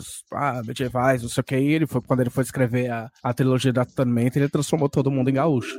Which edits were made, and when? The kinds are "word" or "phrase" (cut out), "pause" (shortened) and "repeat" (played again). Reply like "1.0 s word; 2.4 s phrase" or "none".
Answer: 3.2 s pause